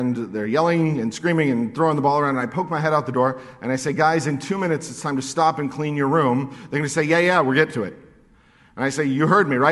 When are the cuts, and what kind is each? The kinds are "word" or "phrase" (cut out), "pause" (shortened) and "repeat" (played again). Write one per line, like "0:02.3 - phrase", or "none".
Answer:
none